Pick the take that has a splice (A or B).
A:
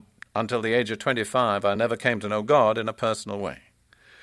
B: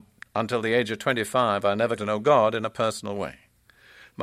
B